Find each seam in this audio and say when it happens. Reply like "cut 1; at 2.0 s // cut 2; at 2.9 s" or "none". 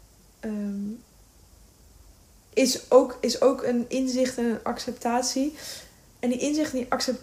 none